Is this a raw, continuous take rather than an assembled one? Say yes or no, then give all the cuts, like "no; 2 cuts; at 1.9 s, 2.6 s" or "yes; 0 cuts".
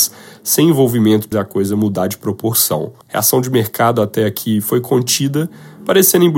no; 2 cuts; at 1.3 s, 3.0 s